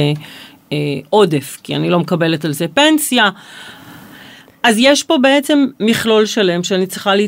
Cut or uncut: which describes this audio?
uncut